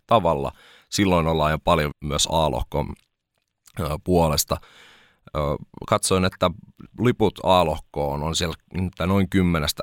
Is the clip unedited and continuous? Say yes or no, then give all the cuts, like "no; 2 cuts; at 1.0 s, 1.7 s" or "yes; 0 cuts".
no; 1 cut; at 1.9 s